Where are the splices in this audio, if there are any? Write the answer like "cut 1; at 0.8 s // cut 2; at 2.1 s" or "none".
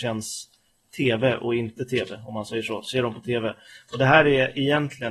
none